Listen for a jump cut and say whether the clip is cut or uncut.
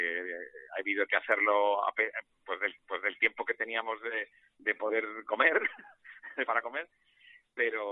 cut